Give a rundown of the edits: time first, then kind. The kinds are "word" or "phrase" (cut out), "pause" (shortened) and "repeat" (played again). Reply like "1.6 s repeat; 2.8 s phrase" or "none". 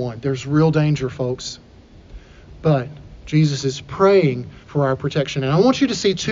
4.6 s pause